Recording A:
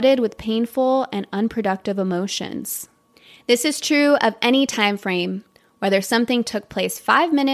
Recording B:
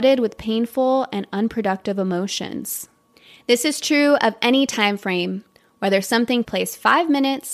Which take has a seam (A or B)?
B